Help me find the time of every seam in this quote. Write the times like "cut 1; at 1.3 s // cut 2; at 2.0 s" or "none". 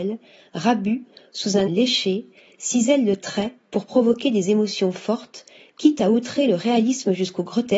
cut 1; at 1.7 s